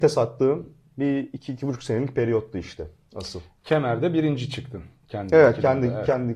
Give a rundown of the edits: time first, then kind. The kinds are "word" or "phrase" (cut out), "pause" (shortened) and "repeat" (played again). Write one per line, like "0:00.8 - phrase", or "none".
none